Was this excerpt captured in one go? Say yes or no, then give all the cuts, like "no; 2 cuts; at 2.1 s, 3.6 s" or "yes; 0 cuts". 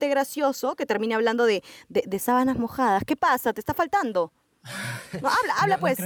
yes; 0 cuts